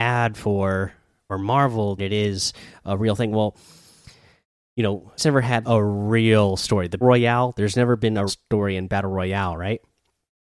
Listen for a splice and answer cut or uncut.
cut